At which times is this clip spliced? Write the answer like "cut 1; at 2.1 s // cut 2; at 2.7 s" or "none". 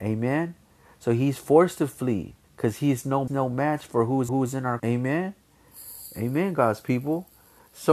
cut 1; at 2.4 s // cut 2; at 3.3 s // cut 3; at 4.3 s // cut 4; at 4.8 s